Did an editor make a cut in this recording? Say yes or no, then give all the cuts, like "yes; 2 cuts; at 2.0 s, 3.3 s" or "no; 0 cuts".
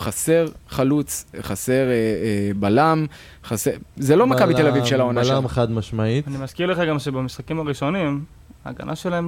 no; 0 cuts